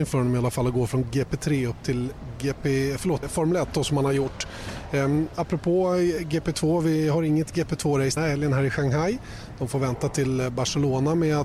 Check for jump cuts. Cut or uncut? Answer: cut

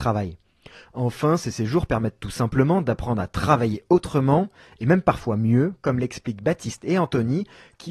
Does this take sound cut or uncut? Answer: uncut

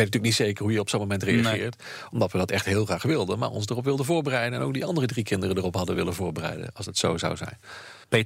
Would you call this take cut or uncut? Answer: uncut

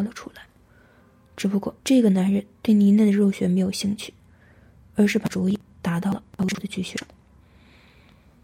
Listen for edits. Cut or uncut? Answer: cut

